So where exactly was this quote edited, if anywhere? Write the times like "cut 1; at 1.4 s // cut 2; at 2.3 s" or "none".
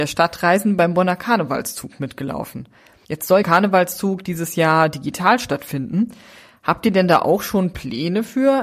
cut 1; at 3.4 s

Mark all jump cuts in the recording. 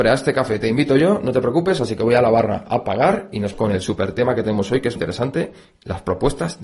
cut 1; at 3.5 s // cut 2; at 5.0 s

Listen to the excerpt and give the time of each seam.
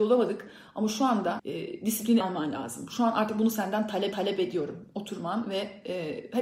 cut 1; at 1.4 s // cut 2; at 2.2 s // cut 3; at 4.1 s

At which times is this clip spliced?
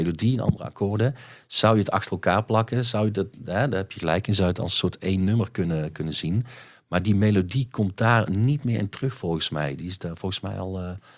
none

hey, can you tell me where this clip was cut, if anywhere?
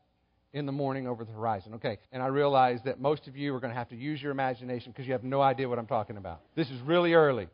cut 1; at 2.0 s // cut 2; at 6.5 s

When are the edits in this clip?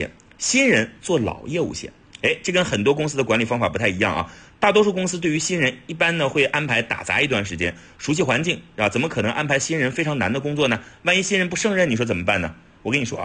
none

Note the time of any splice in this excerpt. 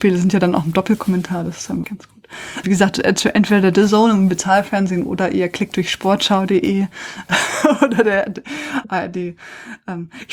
cut 1; at 1.8 s // cut 2; at 2.6 s // cut 3; at 5.7 s

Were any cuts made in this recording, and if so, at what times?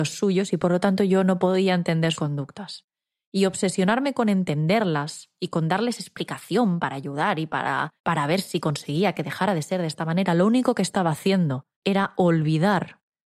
cut 1; at 2.1 s // cut 2; at 8.0 s // cut 3; at 11.7 s

